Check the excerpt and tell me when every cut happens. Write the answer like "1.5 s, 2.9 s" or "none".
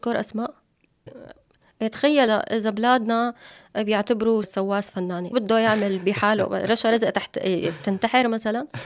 1.1 s, 2.3 s, 4.4 s, 5.3 s